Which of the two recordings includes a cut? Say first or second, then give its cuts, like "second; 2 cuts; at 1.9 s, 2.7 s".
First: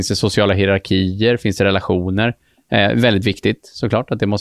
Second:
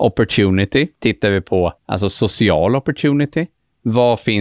second; 2 cuts; at 0.9 s, 1.8 s